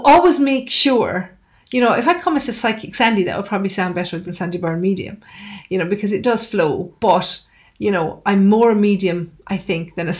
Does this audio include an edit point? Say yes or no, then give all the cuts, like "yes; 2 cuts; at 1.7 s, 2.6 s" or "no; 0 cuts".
no; 0 cuts